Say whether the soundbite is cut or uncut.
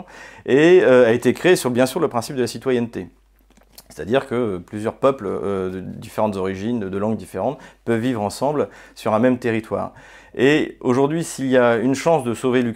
uncut